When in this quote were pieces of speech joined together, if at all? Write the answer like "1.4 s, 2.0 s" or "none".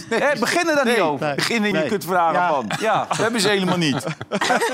1.7 s